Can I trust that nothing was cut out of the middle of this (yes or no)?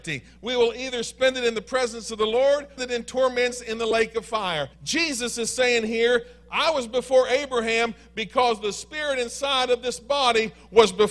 no